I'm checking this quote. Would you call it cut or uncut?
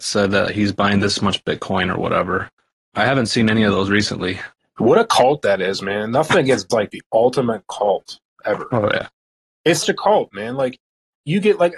cut